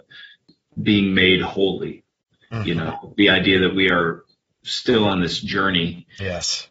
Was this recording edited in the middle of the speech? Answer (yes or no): no